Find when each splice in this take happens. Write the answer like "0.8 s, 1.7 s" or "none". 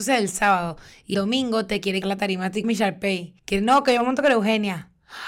1.1 s, 2.0 s, 2.6 s, 3.4 s